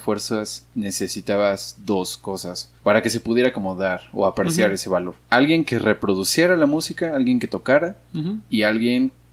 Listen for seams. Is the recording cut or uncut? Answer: cut